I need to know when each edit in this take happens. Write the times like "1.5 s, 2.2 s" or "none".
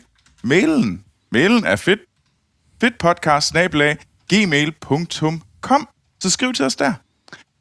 none